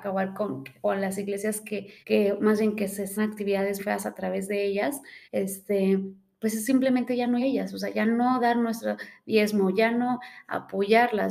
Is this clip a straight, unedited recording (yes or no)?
no